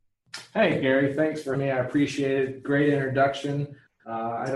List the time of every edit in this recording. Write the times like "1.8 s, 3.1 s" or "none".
1.5 s